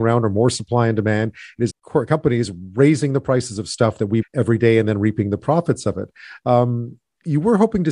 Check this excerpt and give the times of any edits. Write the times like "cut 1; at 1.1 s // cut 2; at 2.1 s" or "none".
cut 1; at 1.7 s // cut 2; at 4.2 s